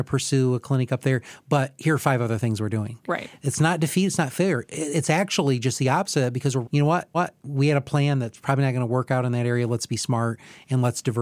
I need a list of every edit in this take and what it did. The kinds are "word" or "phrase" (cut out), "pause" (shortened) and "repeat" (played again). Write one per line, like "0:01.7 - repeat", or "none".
0:06.6 - word
0:07.1 - repeat